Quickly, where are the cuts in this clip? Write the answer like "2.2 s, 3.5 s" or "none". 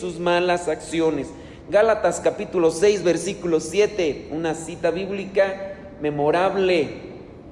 none